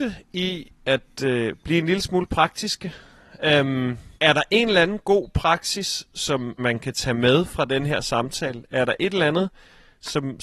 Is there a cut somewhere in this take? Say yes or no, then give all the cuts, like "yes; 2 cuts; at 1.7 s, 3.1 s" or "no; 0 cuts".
yes; 2 cuts; at 4.2 s, 6.6 s